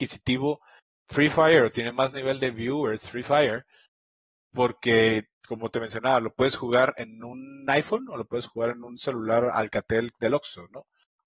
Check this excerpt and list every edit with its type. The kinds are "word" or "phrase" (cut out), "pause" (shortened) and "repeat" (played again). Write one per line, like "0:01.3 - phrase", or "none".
none